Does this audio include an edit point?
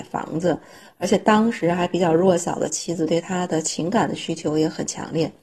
no; 0 cuts

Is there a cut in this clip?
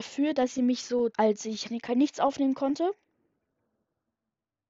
yes; 2 cuts; at 1.1 s, 1.6 s

